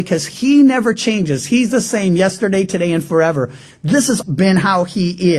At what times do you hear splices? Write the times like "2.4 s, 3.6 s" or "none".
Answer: 4.2 s